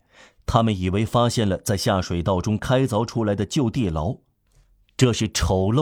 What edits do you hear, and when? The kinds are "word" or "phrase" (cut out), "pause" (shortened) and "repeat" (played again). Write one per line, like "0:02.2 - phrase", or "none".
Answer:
none